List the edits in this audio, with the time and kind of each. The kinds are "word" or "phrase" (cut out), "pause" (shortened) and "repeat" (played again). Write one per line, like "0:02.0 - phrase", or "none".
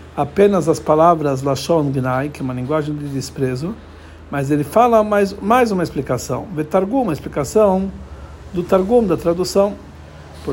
none

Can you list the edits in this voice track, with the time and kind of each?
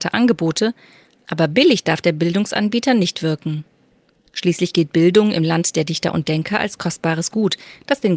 none

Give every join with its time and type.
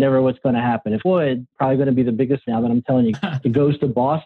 0:01.0 - word
0:01.5 - word
0:02.4 - word
0:03.1 - word

